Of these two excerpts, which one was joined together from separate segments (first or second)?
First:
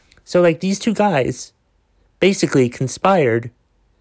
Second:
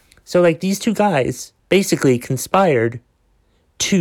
second